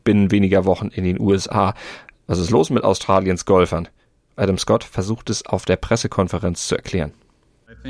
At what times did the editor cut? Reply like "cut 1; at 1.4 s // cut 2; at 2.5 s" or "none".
none